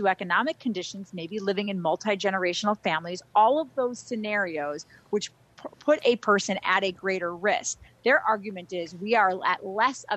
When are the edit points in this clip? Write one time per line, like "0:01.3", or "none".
none